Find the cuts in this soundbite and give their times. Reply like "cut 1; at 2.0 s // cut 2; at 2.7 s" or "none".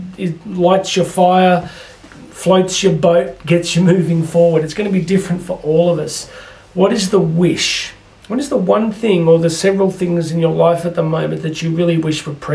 cut 1; at 8.1 s